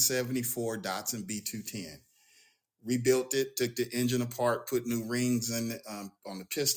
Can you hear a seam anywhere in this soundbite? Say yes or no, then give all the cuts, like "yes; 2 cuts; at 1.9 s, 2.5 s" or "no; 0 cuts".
no; 0 cuts